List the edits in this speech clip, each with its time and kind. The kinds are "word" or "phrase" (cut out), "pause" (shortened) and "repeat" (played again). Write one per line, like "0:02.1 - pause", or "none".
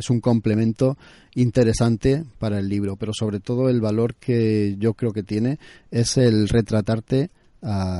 none